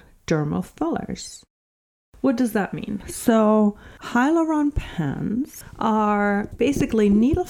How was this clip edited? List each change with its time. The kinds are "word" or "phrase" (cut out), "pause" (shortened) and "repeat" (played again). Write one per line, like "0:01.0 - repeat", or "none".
none